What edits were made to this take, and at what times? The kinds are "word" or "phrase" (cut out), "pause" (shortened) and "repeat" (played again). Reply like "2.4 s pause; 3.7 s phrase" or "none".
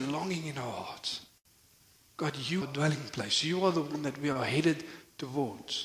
2.6 s word